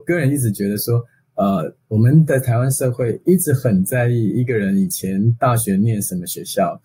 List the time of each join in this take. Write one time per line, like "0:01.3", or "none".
none